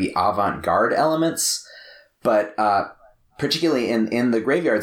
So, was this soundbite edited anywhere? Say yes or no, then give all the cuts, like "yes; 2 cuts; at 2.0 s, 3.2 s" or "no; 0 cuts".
no; 0 cuts